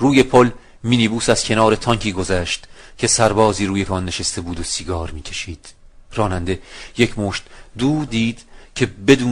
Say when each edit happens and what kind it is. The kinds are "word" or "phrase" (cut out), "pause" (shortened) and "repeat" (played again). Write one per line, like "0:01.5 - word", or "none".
0:03.9 - word
0:06.1 - pause
0:08.1 - word